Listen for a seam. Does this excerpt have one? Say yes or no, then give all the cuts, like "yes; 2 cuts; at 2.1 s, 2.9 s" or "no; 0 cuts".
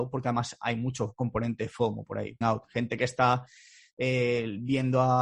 yes; 1 cut; at 2.4 s